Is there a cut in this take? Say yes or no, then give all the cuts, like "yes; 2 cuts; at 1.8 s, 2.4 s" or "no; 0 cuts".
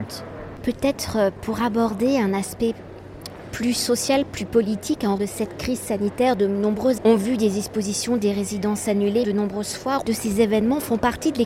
yes; 4 cuts; at 5.2 s, 7.0 s, 9.2 s, 10.0 s